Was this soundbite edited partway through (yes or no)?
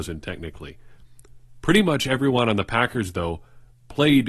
no